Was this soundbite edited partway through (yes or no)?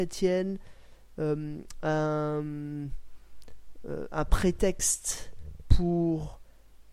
no